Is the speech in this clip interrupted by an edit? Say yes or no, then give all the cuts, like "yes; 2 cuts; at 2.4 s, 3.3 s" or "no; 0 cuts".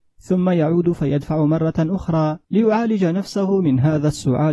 yes; 1 cut; at 2.4 s